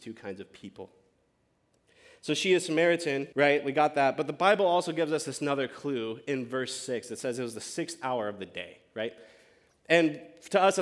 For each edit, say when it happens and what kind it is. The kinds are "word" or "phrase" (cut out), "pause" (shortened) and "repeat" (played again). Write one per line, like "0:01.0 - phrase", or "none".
0:03.3 - pause